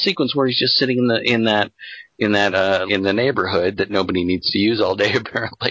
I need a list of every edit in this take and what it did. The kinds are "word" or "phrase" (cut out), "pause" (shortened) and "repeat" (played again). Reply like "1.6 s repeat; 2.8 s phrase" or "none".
2.9 s phrase